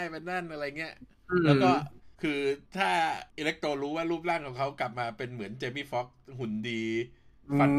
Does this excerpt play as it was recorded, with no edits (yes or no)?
no